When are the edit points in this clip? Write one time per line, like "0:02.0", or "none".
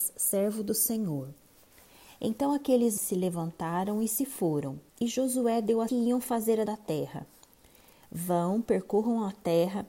0:03.0
0:04.9
0:05.9
0:06.7